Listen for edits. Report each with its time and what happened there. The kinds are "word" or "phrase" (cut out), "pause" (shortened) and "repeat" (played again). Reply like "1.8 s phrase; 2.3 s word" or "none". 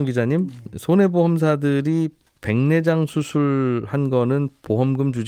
none